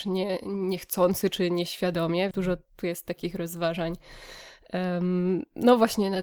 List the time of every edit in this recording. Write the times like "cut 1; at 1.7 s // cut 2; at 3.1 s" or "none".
cut 1; at 2.3 s